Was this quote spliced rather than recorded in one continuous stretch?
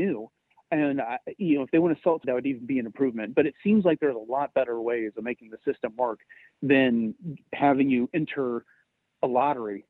yes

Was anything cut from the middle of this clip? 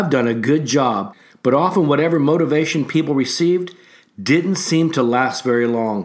no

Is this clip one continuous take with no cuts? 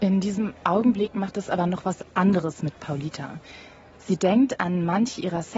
yes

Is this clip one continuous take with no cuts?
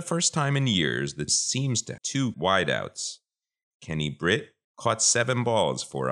no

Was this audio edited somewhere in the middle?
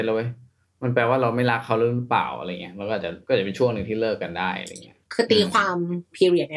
yes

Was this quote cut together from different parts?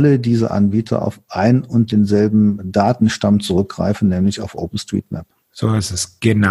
no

